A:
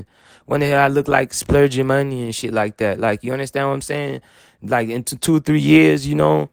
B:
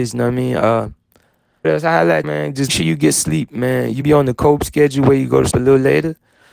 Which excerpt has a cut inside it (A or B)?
B